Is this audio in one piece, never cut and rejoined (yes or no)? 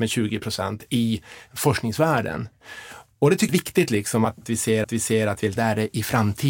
no